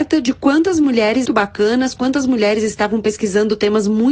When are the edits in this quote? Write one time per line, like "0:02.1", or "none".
0:01.3